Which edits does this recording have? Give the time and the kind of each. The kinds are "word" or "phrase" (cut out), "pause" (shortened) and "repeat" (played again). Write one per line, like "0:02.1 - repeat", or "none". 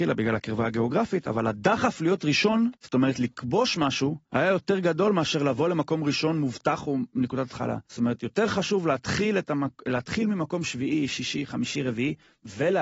0:02.8 - pause
0:04.2 - pause
0:07.8 - pause